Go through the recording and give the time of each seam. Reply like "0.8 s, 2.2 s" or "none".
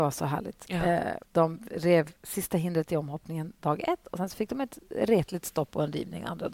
1.3 s, 2.2 s